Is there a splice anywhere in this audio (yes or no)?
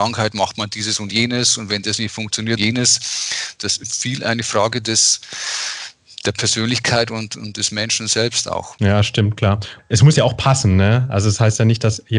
yes